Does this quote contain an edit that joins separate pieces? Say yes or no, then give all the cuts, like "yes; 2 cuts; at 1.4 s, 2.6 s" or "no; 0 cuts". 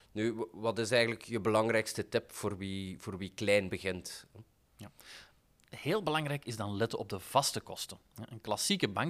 no; 0 cuts